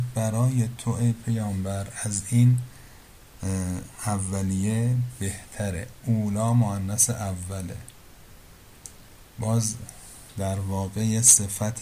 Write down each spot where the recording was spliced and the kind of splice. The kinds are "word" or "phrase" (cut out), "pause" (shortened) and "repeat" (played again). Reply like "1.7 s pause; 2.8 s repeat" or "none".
none